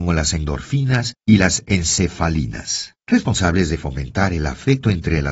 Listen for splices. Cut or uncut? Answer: cut